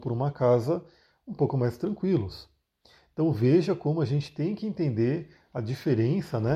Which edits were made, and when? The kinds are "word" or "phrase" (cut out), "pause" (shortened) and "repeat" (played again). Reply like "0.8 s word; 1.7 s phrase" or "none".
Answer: none